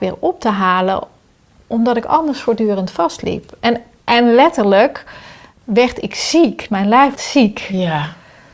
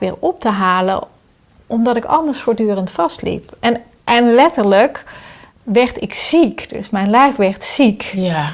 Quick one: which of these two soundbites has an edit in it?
first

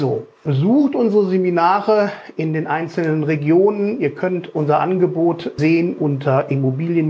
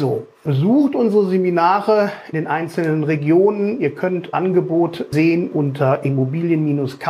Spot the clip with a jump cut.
second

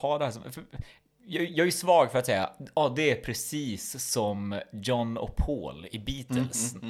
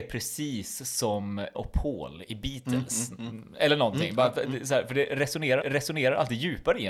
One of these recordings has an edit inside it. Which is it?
second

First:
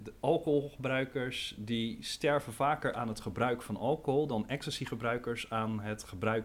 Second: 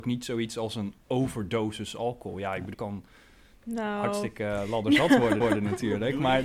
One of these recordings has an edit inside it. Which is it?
second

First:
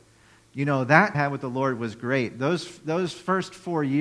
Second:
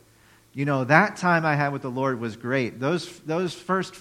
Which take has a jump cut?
first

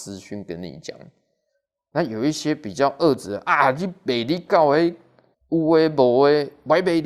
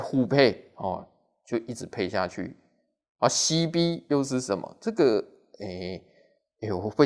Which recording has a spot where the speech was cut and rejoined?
first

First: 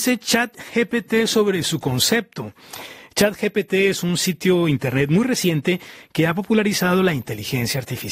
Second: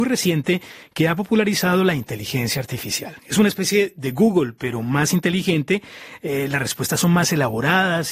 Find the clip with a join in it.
second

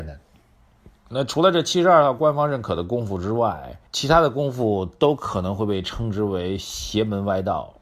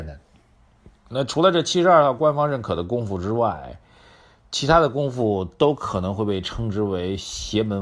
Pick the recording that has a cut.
first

